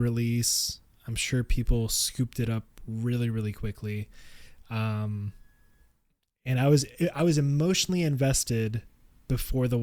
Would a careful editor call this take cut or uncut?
uncut